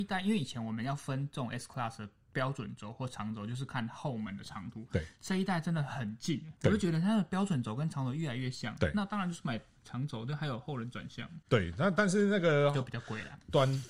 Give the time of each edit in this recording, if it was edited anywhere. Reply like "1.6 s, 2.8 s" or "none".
6.6 s, 11.4 s